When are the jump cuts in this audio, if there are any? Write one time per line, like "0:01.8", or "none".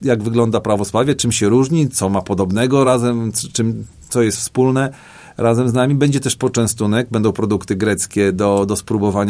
none